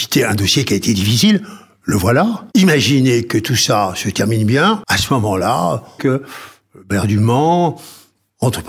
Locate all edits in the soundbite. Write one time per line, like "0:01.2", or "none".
0:02.5
0:06.0